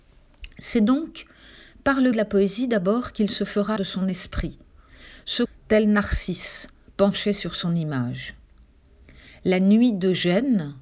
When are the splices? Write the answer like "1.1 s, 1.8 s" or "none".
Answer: 2.1 s, 3.8 s, 5.4 s